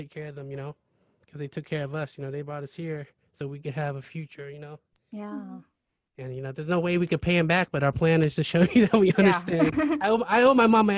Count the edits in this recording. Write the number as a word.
zero